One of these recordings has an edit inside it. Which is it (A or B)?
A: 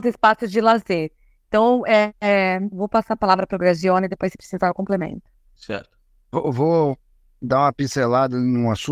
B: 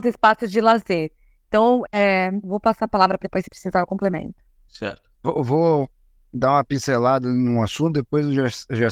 B